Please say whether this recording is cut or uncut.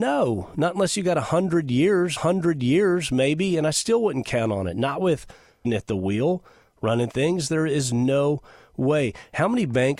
cut